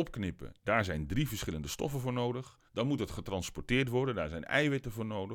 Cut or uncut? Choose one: cut